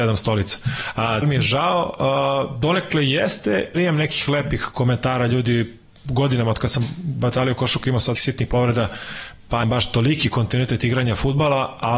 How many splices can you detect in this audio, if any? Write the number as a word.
four